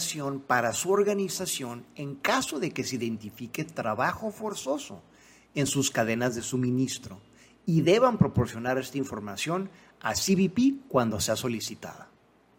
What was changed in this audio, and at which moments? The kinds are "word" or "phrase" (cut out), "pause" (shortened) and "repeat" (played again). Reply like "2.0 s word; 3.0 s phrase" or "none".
none